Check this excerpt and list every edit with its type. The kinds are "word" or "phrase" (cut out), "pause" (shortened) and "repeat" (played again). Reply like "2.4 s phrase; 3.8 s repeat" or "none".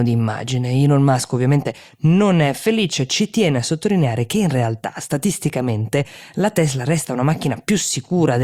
none